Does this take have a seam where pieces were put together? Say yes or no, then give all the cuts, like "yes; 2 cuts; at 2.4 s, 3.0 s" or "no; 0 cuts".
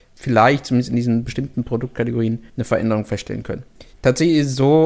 yes; 2 cuts; at 2.5 s, 3.9 s